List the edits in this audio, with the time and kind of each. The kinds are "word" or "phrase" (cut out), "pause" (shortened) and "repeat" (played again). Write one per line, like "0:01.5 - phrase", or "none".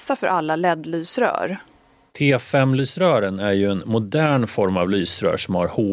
none